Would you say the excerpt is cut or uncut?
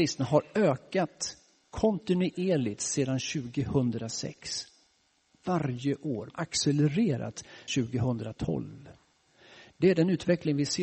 cut